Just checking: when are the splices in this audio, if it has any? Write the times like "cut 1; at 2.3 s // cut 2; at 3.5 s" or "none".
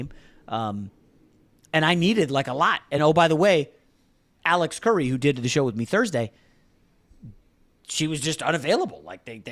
none